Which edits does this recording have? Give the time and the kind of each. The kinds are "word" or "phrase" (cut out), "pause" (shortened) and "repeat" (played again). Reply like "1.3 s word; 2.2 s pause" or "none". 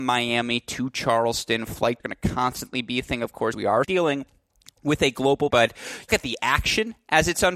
2.0 s word; 3.5 s word; 3.8 s word; 5.5 s word; 6.1 s word